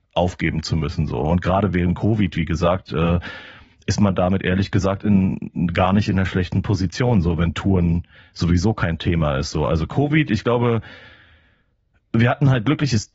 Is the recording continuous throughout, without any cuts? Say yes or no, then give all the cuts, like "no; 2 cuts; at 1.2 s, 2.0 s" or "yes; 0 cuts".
yes; 0 cuts